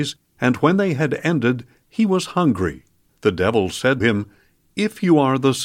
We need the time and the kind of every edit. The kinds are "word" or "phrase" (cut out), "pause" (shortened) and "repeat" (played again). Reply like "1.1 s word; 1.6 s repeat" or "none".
3.1 s pause; 4.0 s word